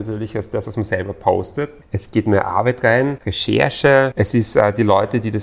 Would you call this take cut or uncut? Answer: uncut